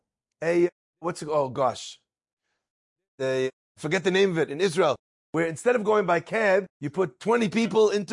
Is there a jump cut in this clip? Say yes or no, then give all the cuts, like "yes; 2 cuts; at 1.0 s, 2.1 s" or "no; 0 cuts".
no; 0 cuts